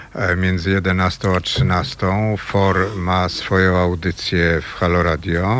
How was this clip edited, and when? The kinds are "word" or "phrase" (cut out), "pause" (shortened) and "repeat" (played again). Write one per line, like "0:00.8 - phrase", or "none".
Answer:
none